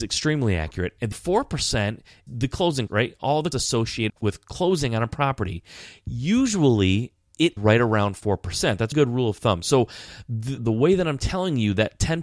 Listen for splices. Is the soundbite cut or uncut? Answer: cut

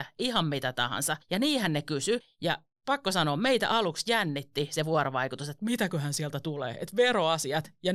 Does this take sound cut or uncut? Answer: uncut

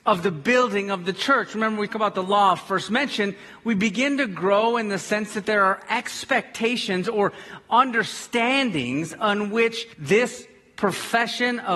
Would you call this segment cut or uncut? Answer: cut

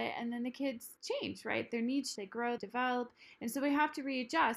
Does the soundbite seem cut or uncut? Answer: cut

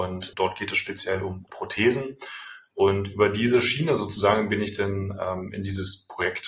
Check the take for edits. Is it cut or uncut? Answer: cut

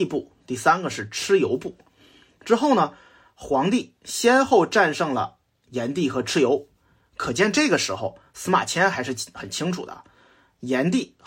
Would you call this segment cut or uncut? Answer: uncut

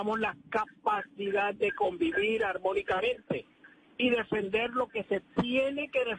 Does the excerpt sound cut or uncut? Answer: uncut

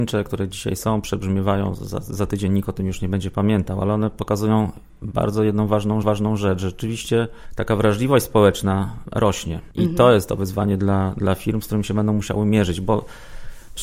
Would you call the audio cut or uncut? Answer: cut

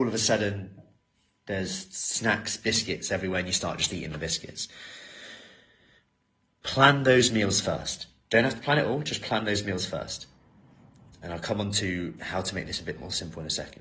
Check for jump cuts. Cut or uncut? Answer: uncut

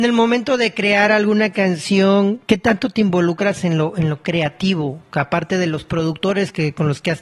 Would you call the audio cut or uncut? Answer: cut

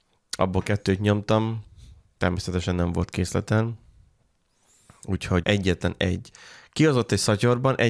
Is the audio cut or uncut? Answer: cut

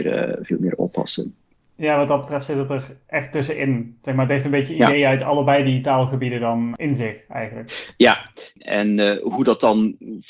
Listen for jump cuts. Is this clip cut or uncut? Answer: uncut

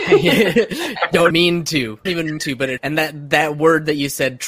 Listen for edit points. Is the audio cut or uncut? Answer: cut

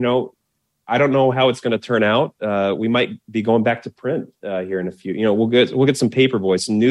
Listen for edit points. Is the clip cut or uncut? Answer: uncut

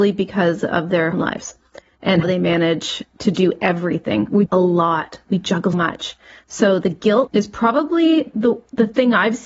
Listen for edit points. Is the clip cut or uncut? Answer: cut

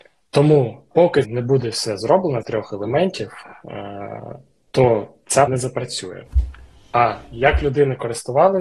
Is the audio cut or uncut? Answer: cut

